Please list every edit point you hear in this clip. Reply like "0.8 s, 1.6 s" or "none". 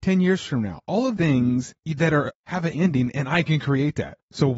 1.2 s, 2.3 s, 2.7 s